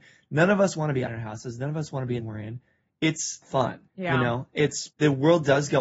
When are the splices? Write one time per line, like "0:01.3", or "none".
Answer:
0:01.1
0:02.2
0:03.4
0:03.9
0:04.9